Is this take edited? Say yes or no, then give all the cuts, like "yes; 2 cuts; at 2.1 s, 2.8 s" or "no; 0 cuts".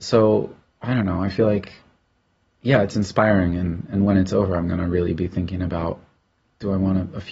no; 0 cuts